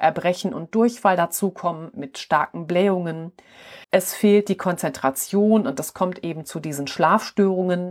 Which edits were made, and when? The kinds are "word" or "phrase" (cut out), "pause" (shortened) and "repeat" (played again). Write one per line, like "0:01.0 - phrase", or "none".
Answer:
0:03.8 - pause